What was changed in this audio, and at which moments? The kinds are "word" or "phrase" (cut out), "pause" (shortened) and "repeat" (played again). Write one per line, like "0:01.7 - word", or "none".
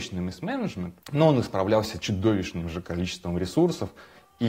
0:01.0 - pause